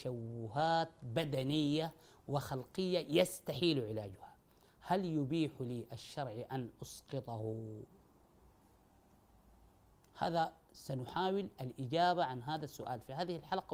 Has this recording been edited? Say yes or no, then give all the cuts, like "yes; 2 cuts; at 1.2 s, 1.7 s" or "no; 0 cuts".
no; 0 cuts